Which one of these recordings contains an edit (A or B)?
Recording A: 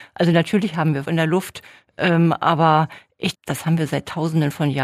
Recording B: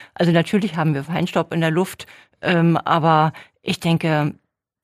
A